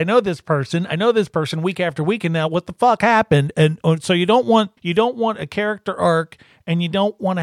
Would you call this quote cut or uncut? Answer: cut